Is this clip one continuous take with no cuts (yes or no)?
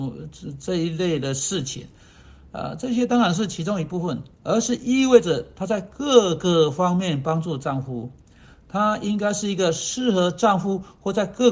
no